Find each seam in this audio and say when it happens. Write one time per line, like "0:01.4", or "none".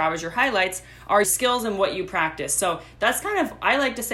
0:01.2